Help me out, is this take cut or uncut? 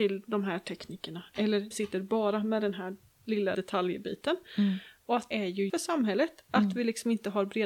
cut